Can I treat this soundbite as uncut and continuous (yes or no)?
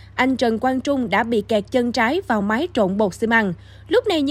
yes